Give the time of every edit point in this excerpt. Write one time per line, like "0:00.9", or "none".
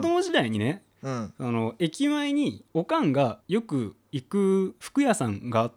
0:02.7
0:03.4